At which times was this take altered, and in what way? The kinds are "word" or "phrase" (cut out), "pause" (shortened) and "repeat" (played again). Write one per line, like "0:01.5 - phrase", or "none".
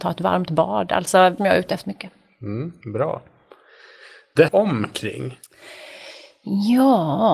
0:01.4 - phrase
0:01.8 - word
0:02.8 - pause
0:04.5 - phrase